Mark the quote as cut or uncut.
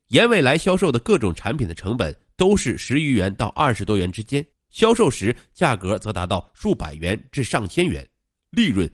cut